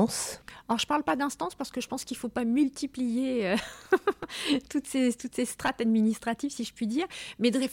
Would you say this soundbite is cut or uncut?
uncut